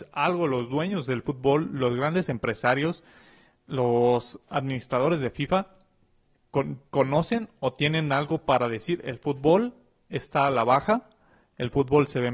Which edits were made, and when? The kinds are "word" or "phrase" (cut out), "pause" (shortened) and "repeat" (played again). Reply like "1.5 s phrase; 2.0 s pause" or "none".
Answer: 4.4 s pause; 6.9 s pause